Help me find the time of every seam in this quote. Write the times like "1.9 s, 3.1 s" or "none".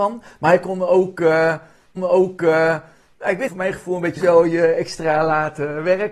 2.0 s, 3.5 s, 4.2 s